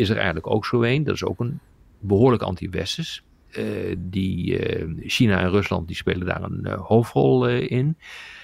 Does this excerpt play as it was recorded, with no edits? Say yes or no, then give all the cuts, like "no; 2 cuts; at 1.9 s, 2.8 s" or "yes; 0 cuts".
yes; 0 cuts